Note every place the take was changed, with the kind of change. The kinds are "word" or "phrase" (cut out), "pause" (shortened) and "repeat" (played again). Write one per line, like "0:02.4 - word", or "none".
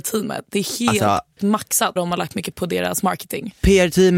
0:01.4 - word
0:02.0 - word
0:02.5 - word